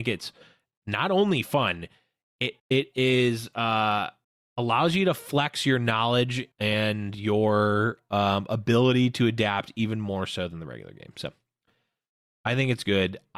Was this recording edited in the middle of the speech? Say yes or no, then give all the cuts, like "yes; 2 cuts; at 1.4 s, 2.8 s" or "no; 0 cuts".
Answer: yes; 3 cuts; at 2.6 s, 4.2 s, 6.5 s